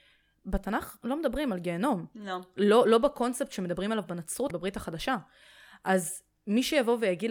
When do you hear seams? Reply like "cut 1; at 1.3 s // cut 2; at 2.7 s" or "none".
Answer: cut 1; at 4.5 s